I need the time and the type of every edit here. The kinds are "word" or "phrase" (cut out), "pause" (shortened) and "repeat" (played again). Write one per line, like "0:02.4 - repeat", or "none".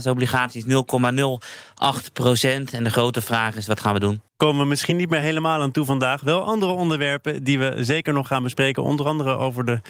none